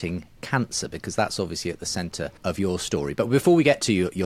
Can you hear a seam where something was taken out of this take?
yes; 1 cut; at 2.4 s

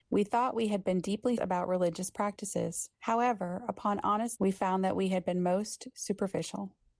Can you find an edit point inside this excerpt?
yes; 3 cuts; at 1.4 s, 2.9 s, 4.4 s

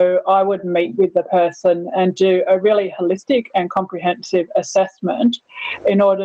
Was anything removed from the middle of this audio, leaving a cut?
no; 0 cuts

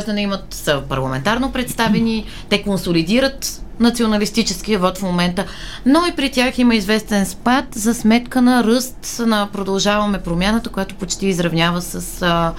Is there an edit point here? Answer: no; 0 cuts

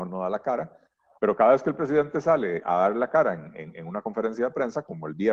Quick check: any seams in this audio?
yes; 1 cut; at 2.6 s

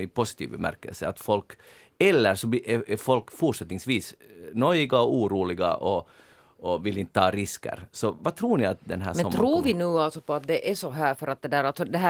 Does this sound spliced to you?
yes; 1 cut; at 8.2 s

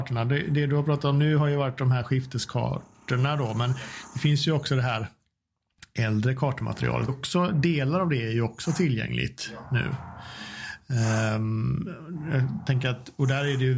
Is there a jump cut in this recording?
yes; 1 cut; at 7.1 s

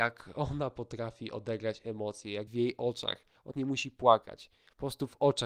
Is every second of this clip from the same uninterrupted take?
no; 2 cuts; at 2.5 s, 3.5 s

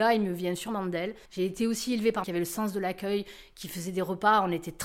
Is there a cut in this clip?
yes; 2 cuts; at 1.3 s, 2.2 s

